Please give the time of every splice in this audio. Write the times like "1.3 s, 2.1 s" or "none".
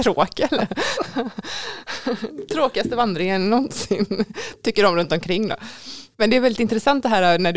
none